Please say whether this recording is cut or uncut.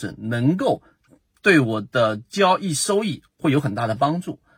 uncut